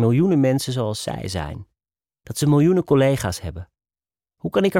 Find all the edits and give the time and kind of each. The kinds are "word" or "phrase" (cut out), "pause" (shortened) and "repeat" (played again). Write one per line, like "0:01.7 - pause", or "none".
none